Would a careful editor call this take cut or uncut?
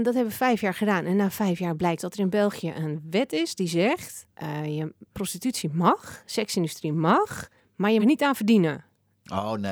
cut